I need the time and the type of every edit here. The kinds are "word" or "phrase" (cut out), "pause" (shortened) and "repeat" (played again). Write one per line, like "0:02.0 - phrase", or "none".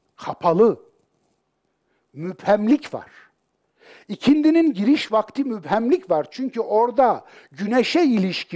none